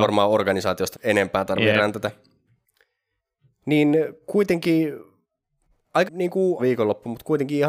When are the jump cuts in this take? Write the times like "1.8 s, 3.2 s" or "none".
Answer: 0.9 s, 6.0 s, 6.6 s